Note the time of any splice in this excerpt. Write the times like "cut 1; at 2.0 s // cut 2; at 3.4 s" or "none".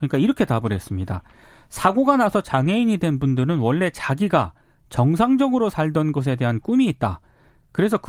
none